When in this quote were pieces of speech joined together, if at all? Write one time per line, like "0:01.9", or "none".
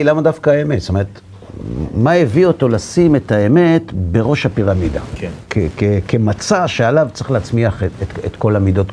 none